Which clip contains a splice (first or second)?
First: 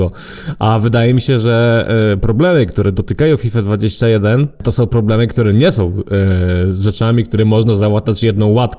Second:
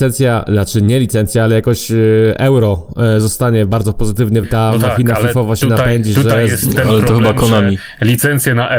second